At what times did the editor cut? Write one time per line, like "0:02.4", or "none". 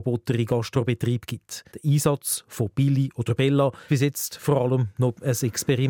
0:01.7
0:03.9